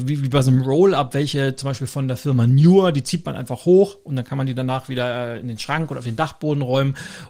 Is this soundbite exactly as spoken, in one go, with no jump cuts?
yes; 0 cuts

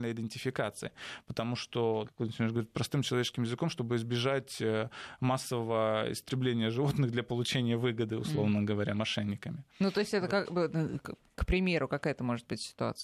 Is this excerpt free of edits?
no; 1 cut; at 2.0 s

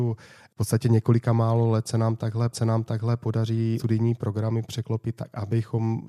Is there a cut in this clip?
yes; 1 cut; at 2.5 s

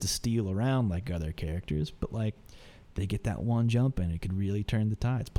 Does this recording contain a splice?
no; 0 cuts

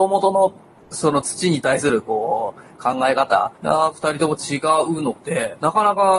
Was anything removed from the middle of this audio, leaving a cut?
yes; 1 cut; at 3.6 s

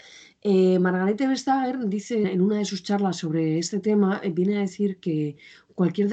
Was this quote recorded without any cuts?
no; 1 cut; at 2.2 s

